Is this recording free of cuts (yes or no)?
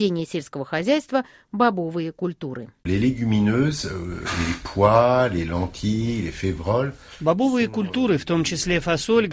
no